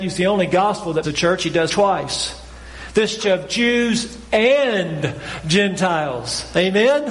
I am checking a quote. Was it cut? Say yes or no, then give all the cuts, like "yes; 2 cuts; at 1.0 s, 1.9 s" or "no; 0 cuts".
yes; 3 cuts; at 1.0 s, 1.7 s, 3.2 s